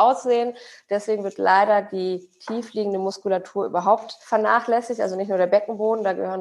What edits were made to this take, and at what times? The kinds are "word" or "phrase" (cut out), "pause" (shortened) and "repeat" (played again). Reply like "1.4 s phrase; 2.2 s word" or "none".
4.2 s pause